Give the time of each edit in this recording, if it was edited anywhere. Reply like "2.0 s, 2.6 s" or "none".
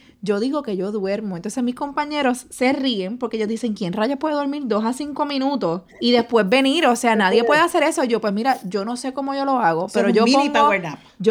5.9 s

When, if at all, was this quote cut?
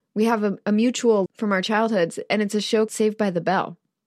1.3 s, 2.9 s

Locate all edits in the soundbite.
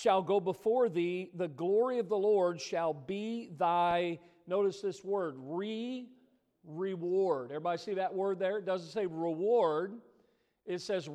none

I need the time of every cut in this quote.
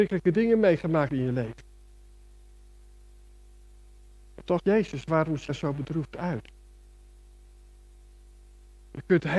1.1 s, 4.6 s, 5.5 s

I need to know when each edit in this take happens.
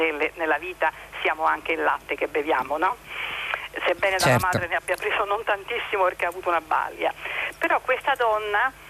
none

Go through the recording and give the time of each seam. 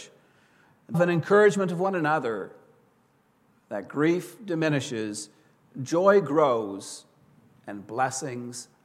0.9 s

